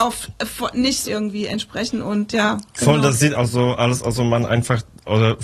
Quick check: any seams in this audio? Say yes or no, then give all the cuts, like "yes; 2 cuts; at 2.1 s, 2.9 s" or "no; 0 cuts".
yes; 2 cuts; at 1.0 s, 3.3 s